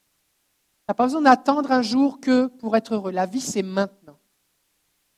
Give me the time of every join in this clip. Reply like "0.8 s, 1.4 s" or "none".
none

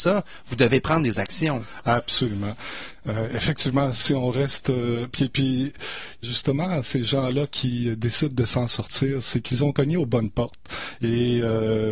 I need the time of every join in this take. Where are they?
6.2 s

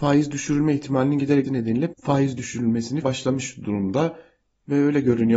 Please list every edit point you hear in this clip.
1.5 s, 1.9 s, 3.0 s

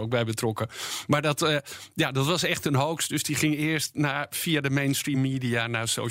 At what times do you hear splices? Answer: none

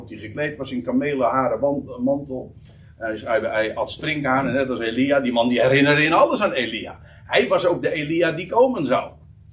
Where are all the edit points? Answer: none

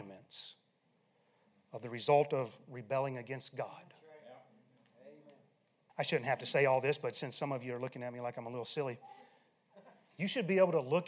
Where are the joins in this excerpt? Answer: none

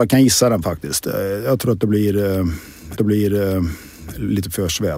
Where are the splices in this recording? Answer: 3.0 s

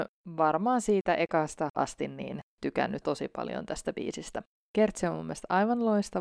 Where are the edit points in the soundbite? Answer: 1.7 s, 3.0 s, 4.5 s

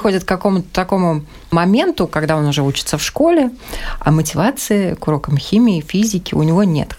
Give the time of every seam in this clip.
none

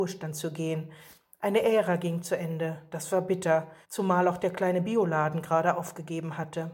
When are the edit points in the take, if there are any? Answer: 3.8 s

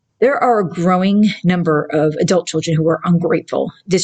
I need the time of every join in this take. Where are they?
none

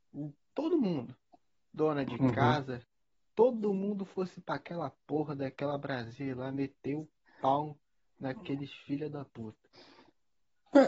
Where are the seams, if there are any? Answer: none

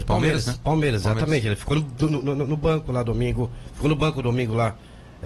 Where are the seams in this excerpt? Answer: 2.0 s

